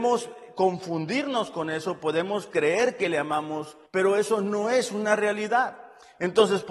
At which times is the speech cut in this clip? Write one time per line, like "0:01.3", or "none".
0:03.9

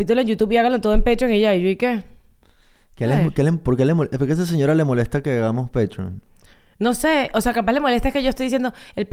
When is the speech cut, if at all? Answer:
none

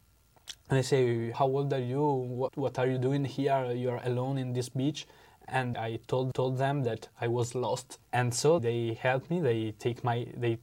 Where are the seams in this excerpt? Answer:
0:01.3
0:02.5
0:05.7
0:06.3
0:08.0
0:08.6

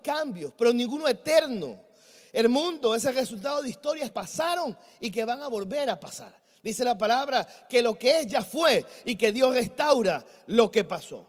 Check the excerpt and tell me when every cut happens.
0:04.1

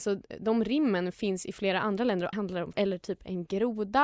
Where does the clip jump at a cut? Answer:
0:02.3
0:02.7

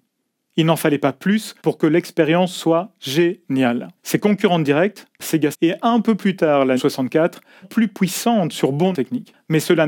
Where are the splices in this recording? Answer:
0:01.6
0:04.0
0:05.2
0:05.5
0:06.8
0:07.6
0:08.9

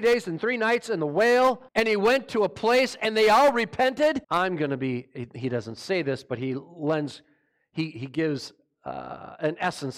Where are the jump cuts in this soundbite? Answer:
0:01.7
0:04.2

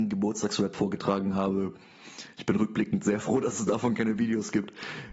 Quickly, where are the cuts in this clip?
none

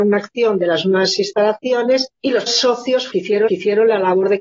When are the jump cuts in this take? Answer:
0:02.1
0:02.5
0:03.1
0:03.5

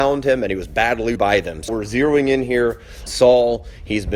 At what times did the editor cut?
0:01.2
0:01.7
0:03.1

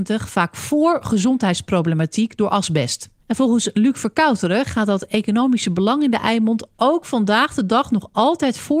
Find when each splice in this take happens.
0:03.2

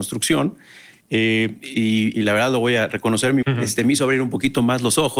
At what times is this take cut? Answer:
0:02.1
0:03.4

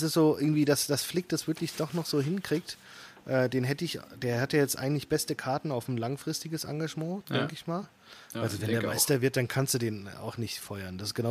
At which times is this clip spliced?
none

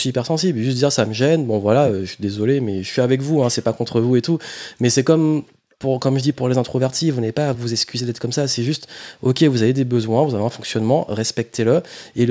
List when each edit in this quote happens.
none

